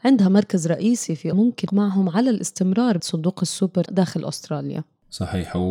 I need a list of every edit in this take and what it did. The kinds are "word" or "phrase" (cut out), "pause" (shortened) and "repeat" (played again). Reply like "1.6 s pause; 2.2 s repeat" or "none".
1.3 s word; 1.7 s word; 3.0 s word; 3.9 s word